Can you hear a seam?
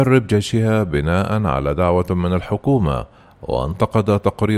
no; 0 cuts

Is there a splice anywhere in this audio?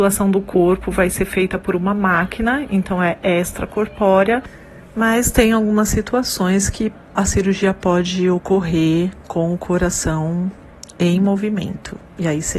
no; 0 cuts

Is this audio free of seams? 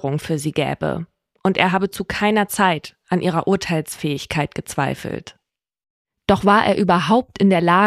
yes; 0 cuts

